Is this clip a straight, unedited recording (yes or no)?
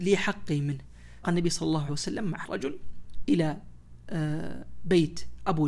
no